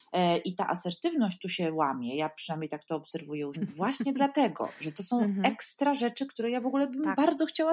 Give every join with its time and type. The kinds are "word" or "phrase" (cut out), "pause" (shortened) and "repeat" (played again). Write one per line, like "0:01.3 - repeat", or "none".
0:03.5 - word